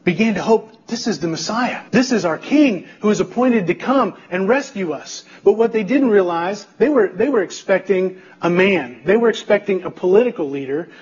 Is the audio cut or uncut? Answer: cut